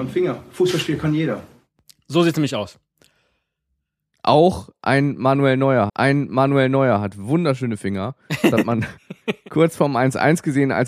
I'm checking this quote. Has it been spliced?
yes; 1 cut; at 5.9 s

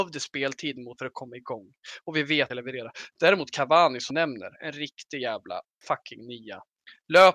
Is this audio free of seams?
no; 4 cuts; at 1.0 s, 2.5 s, 4.1 s, 5.7 s

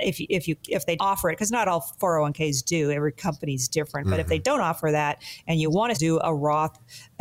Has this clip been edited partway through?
yes; 2 cuts; at 1.0 s, 5.9 s

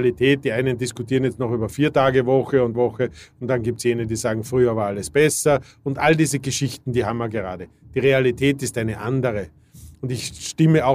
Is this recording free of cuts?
no; 1 cut; at 2.7 s

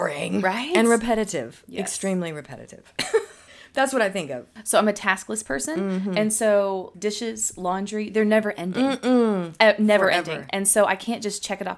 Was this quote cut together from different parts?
no; 0 cuts

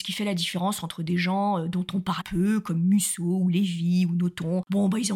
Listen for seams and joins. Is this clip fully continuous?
no; 1 cut; at 2.2 s

